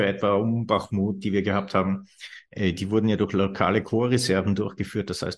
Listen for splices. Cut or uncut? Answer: uncut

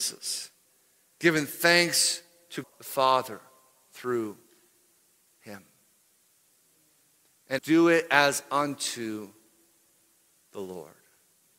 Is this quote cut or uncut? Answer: cut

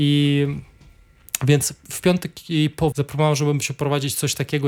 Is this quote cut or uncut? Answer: cut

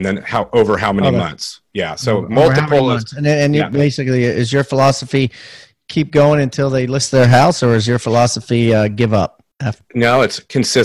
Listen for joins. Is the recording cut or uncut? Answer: uncut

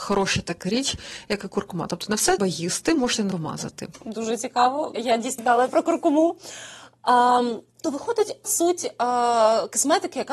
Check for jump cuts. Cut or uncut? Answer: cut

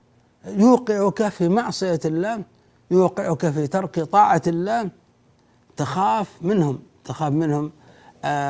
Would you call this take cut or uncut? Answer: uncut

